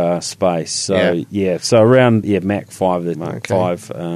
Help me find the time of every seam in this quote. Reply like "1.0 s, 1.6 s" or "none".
2.2 s, 3.1 s